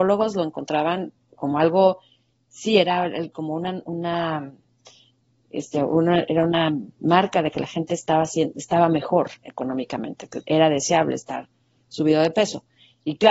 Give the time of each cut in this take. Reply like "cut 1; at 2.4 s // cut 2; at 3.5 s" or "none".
cut 1; at 3.8 s // cut 2; at 10.4 s